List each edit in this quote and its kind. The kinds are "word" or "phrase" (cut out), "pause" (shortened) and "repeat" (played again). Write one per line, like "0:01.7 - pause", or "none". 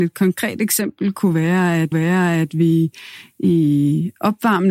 0:01.9 - repeat